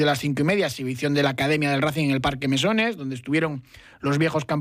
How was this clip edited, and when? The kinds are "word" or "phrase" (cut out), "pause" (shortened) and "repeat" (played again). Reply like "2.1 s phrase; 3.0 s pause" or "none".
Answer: none